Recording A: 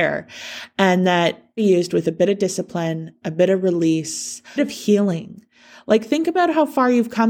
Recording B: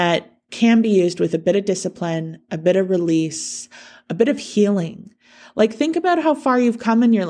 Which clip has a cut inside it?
A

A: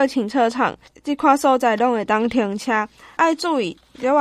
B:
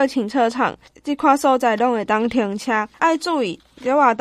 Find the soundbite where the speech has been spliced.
B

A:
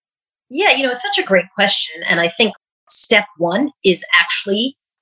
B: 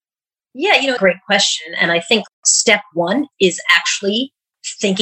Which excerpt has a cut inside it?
B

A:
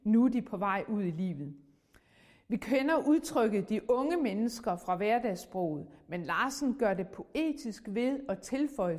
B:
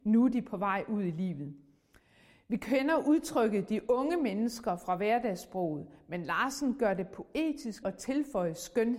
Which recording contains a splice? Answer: B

